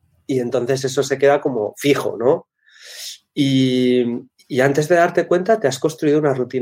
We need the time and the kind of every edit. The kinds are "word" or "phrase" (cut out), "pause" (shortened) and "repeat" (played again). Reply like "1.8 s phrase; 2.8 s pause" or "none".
4.3 s pause